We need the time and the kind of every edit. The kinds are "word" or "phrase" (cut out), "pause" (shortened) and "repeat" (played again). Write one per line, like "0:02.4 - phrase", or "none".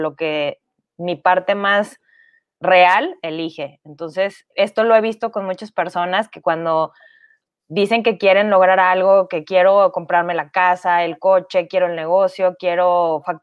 0:04.5 - pause